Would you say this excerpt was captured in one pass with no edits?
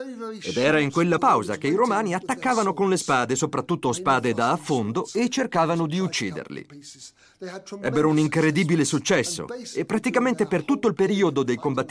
no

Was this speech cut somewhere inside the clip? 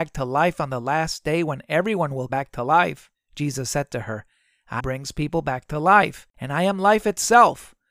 yes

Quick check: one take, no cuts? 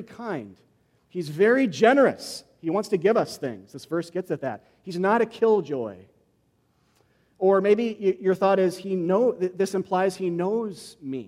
yes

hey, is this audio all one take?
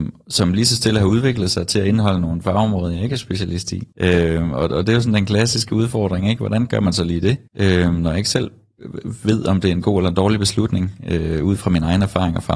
no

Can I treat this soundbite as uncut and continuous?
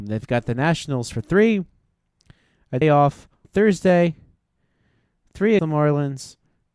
no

